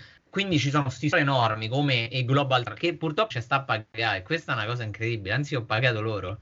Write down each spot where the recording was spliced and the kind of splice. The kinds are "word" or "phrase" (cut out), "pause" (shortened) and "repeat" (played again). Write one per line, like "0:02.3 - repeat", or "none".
0:01.1 - word
0:02.7 - word
0:03.3 - word